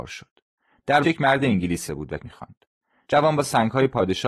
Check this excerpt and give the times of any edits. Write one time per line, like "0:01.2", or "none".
0:01.0
0:01.9
0:02.2